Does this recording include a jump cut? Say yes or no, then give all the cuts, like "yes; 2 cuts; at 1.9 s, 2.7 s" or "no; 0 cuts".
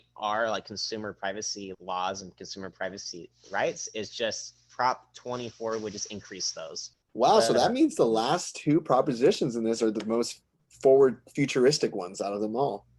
yes; 1 cut; at 1.7 s